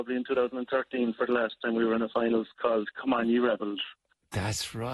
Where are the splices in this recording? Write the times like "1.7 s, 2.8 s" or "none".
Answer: 2.5 s